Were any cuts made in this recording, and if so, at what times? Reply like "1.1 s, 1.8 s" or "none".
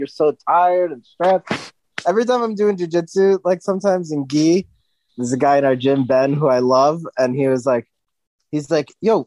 5.1 s

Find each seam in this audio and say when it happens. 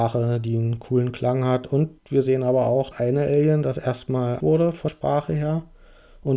2.0 s, 2.9 s, 4.4 s, 4.9 s

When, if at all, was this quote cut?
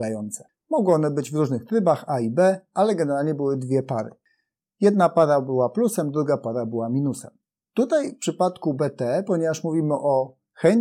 none

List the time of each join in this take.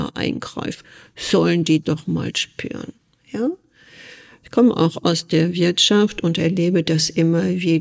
1.8 s

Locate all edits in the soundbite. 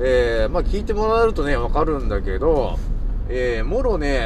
none

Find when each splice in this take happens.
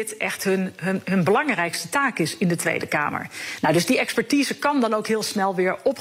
none

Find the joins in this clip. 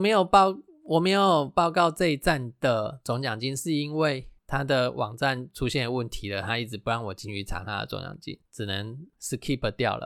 4.4 s, 8.4 s

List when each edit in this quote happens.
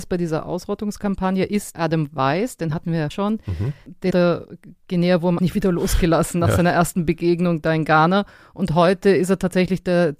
1.7 s, 3.1 s, 4.1 s, 5.4 s

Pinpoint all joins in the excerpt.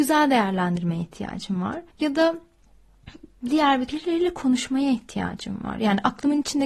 1.9 s, 3.9 s

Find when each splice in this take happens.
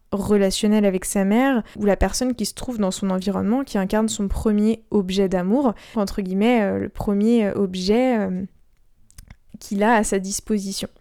1.7 s, 5.9 s

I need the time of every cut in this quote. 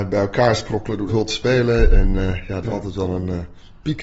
1.1 s, 2.6 s

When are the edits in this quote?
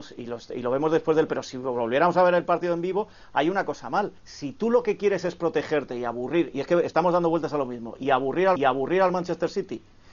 1.3 s, 4.2 s, 8.6 s

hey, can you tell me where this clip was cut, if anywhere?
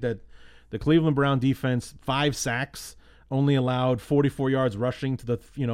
none

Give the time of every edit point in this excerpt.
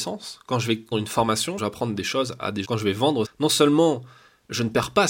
0.9 s, 1.6 s, 2.6 s, 3.2 s

